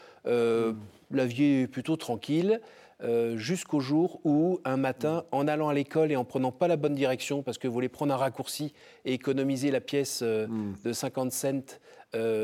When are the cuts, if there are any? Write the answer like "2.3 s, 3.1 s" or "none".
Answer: none